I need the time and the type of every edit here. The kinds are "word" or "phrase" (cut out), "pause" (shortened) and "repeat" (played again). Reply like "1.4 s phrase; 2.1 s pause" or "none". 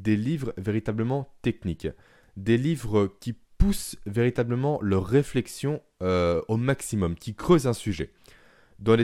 none